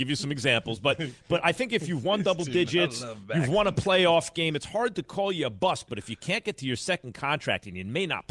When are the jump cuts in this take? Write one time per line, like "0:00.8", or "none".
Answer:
none

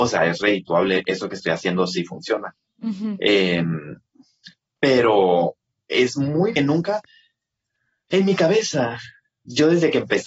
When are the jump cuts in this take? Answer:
0:06.6

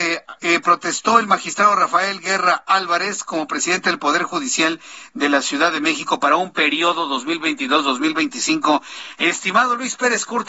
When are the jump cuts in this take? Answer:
none

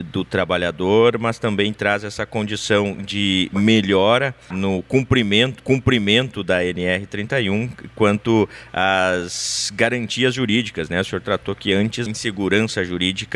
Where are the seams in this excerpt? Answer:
0:04.5
0:05.6
0:12.1

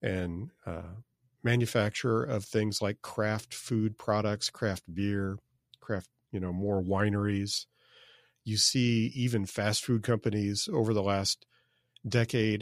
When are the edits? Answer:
none

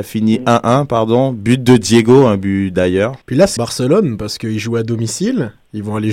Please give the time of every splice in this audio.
0:03.2
0:03.6

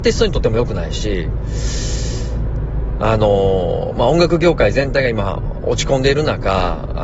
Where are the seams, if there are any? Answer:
none

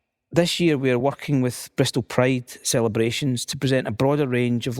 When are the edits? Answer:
none

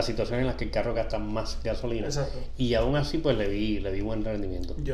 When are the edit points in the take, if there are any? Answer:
none

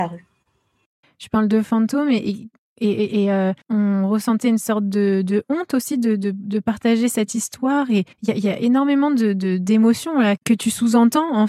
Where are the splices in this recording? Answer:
0:03.6
0:08.1

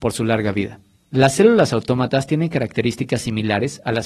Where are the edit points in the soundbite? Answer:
0:01.0

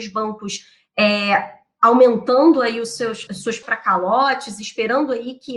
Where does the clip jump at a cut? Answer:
0:03.3
0:03.6

